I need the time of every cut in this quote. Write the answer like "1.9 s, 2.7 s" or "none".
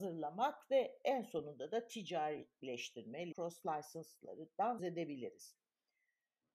3.3 s, 4.8 s

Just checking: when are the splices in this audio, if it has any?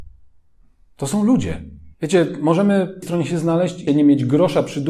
1.9 s, 3.0 s, 3.9 s

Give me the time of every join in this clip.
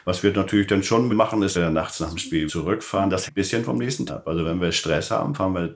1.1 s, 1.5 s, 2.5 s, 3.3 s, 4.1 s

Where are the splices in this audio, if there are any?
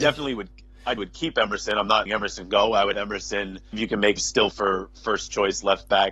1.0 s, 2.1 s, 2.9 s, 3.7 s, 4.2 s, 4.5 s

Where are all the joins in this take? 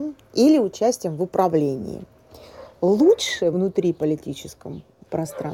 3.5 s

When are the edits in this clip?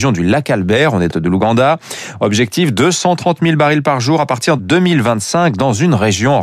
1.1 s, 4.6 s

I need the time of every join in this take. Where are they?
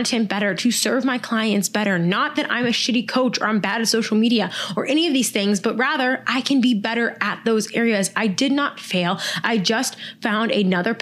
none

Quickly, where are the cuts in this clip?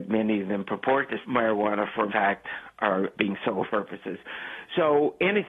1.2 s, 2.1 s, 3.1 s, 3.7 s

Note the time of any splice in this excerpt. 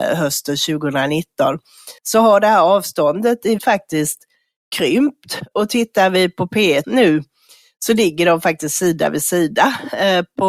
2.0 s, 3.6 s, 6.8 s

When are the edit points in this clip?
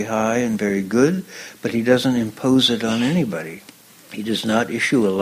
none

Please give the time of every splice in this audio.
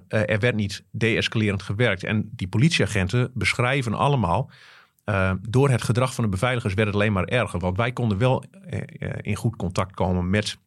none

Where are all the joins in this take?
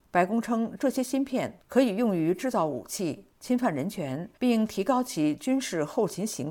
4.3 s

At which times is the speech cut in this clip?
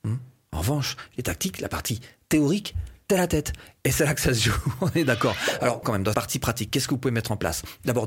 1.2 s, 3.1 s, 5.8 s, 6.1 s

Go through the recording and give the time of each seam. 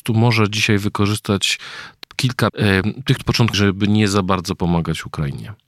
2.0 s, 2.5 s, 3.2 s, 3.5 s

